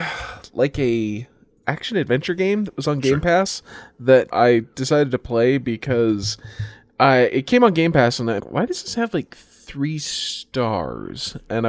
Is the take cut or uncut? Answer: cut